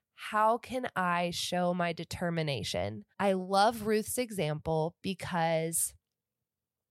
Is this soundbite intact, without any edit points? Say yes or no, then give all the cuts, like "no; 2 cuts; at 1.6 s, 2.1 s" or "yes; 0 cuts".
no; 1 cut; at 3.1 s